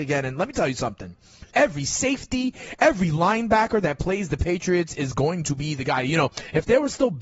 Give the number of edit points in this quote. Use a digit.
1